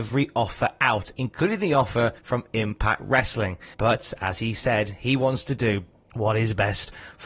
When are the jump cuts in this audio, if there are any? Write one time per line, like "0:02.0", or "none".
0:02.2
0:03.7
0:06.0